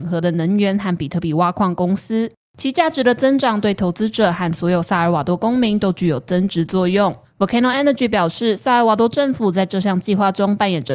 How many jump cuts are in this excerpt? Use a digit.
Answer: 0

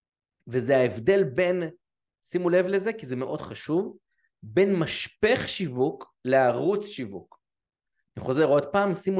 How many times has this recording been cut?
0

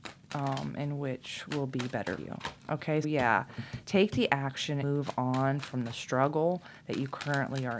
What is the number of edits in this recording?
3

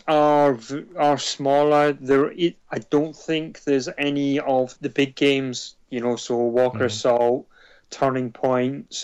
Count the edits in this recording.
1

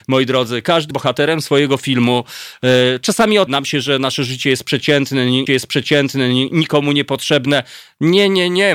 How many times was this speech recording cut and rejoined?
3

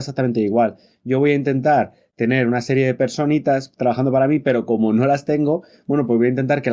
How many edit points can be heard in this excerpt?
0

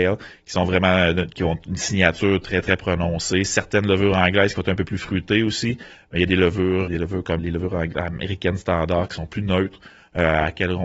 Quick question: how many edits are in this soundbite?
3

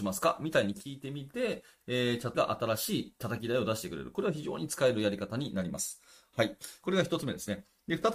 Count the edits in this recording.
1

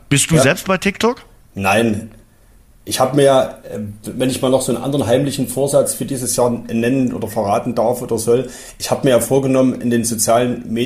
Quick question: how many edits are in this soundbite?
0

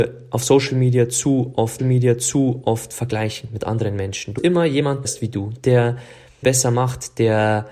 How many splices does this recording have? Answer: 4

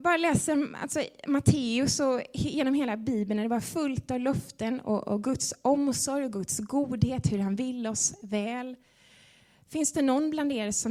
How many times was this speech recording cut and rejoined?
0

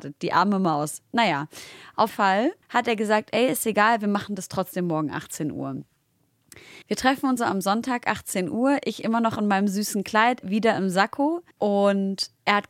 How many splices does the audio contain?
6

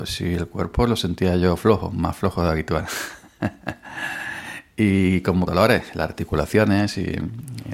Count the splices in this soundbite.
1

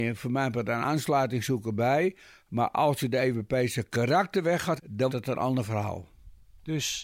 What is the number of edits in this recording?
2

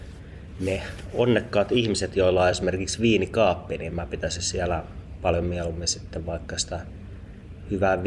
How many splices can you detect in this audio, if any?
0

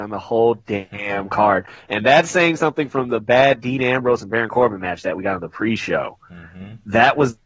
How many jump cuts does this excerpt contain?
0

